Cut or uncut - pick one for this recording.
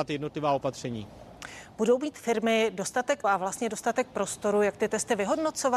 cut